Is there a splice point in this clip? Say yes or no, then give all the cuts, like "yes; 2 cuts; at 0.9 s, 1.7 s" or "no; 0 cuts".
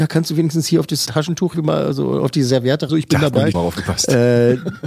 yes; 4 cuts; at 1.1 s, 1.5 s, 2.9 s, 3.5 s